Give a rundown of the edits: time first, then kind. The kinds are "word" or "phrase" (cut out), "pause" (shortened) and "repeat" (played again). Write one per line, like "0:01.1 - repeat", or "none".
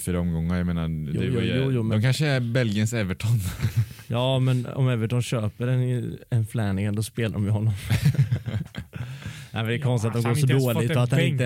none